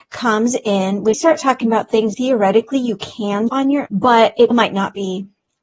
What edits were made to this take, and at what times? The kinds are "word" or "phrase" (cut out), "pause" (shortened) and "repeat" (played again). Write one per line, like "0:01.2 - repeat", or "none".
0:01.1 - word
0:02.1 - word
0:03.5 - word
0:03.9 - word
0:04.5 - word